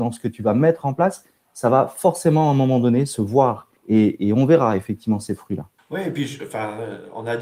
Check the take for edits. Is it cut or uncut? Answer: cut